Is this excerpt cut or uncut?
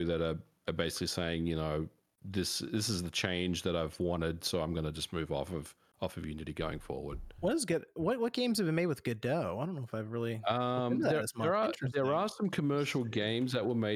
uncut